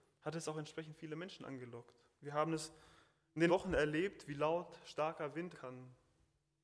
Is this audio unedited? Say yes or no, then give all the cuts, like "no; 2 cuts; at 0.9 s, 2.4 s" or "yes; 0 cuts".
no; 2 cuts; at 3.5 s, 5.5 s